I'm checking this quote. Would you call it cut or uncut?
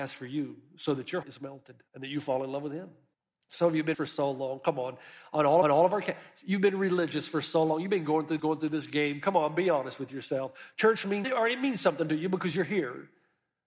cut